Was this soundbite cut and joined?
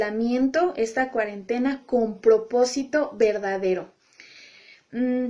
no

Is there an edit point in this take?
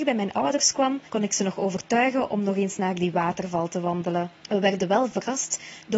yes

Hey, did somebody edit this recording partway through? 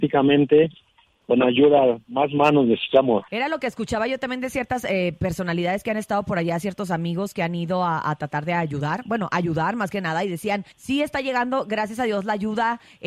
yes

